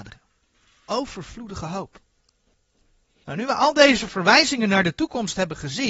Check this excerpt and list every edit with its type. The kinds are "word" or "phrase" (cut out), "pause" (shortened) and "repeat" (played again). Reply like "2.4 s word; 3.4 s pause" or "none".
none